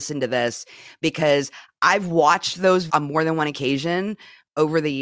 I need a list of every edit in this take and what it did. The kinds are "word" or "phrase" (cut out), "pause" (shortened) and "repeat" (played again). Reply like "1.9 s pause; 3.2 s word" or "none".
2.9 s word